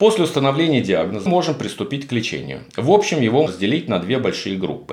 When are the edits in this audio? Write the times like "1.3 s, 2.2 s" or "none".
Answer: 1.3 s, 3.5 s